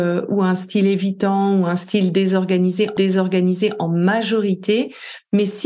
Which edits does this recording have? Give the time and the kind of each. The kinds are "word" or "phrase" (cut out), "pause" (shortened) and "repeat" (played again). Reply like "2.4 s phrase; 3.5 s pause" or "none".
3.0 s repeat